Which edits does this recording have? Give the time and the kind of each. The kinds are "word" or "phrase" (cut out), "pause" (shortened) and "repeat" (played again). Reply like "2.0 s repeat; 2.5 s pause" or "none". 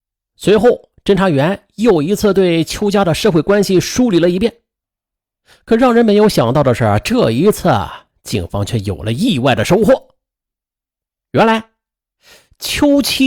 none